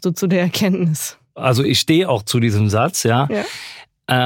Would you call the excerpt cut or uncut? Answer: uncut